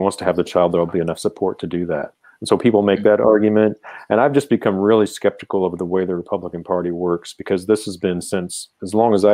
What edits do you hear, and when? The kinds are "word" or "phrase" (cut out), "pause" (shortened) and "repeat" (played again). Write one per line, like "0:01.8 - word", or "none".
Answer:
none